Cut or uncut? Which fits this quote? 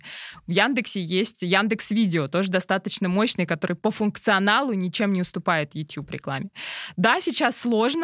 uncut